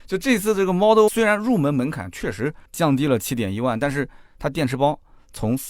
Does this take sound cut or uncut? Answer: cut